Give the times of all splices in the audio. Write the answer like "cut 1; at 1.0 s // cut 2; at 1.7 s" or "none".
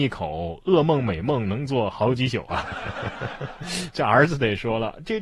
none